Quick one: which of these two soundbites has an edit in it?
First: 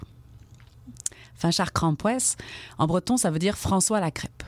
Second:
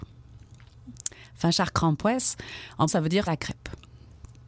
second; 2 cuts; at 2.9 s, 3.3 s

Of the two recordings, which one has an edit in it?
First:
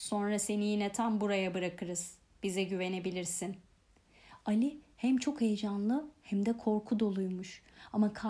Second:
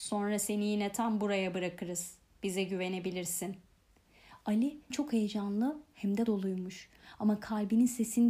second; 2 cuts; at 4.9 s, 6.3 s

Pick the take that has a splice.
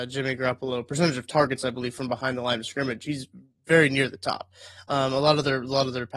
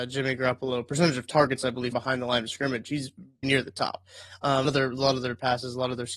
second; 3 cuts; at 1.9 s, 3.4 s, 4.6 s

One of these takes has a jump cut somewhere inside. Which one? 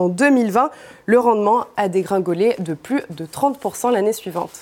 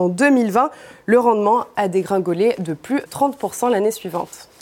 second; 1 cut; at 3.1 s

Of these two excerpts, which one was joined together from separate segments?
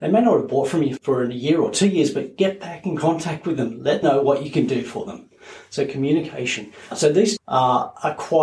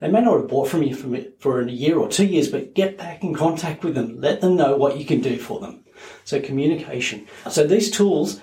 first; 3 cuts; at 1.0 s, 4.0 s, 7.4 s

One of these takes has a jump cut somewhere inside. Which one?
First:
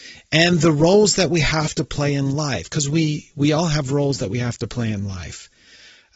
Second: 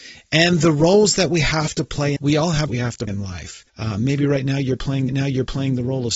second; 5 cuts; at 2.2 s, 2.7 s, 3.1 s, 3.7 s, 5.1 s

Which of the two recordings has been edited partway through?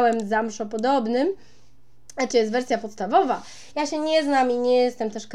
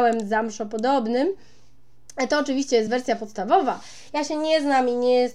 first; 1 cut; at 2.3 s

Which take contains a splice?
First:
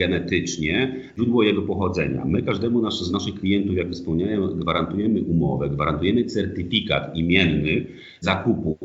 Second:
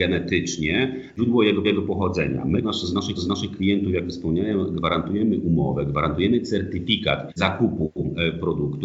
second; 4 cuts; at 1.6 s, 2.6 s, 3.2 s, 7.3 s

